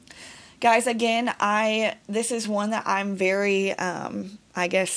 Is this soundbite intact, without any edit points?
yes; 0 cuts

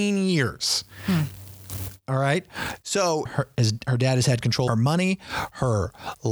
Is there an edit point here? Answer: yes; 2 cuts; at 3.3 s, 4.7 s

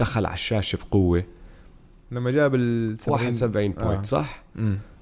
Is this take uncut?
yes; 0 cuts

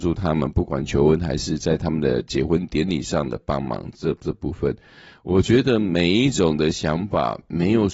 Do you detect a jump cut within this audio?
no; 0 cuts

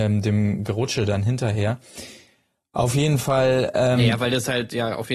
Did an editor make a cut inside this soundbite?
no; 0 cuts

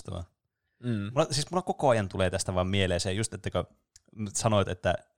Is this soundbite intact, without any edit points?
yes; 0 cuts

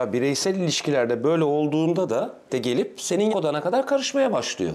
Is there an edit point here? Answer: yes; 2 cuts; at 2.5 s, 3.3 s

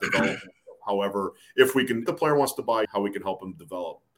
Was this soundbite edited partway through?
yes; 2 cuts; at 2.1 s, 2.8 s

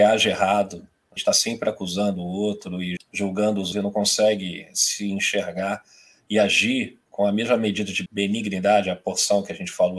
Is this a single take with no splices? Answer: no; 5 cuts; at 1.2 s, 3.0 s, 3.7 s, 7.1 s, 8.1 s

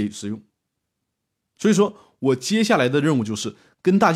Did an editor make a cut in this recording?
no; 0 cuts

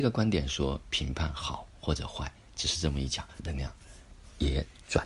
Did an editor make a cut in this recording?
yes; 1 cut; at 3.4 s

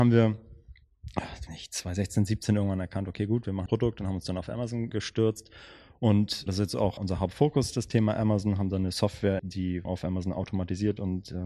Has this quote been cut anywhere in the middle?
yes; 7 cuts; at 1.5 s, 3.7 s, 4.9 s, 6.5 s, 7.0 s, 9.4 s, 9.8 s

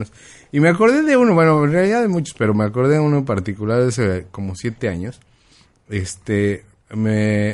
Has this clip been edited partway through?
no; 0 cuts

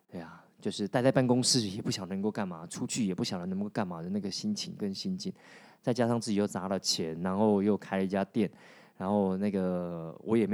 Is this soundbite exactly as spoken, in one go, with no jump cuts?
yes; 0 cuts

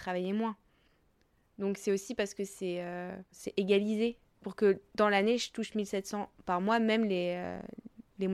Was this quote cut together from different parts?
no; 0 cuts

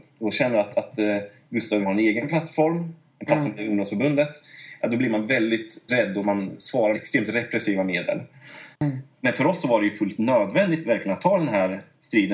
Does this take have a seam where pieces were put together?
yes; 5 cuts; at 1.8 s, 5.9 s, 6.2 s, 6.9 s, 8.7 s

